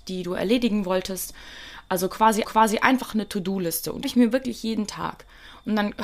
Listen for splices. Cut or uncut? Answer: cut